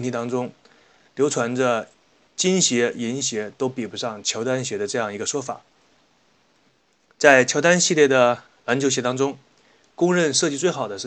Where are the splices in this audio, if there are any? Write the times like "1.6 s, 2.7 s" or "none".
none